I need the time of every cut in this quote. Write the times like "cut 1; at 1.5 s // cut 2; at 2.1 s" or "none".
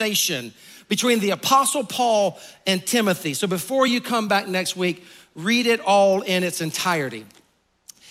none